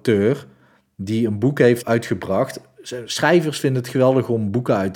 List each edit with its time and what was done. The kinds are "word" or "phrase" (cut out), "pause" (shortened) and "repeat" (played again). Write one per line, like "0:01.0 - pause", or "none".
0:01.8 - word